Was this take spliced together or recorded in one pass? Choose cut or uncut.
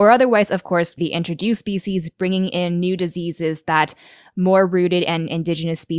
cut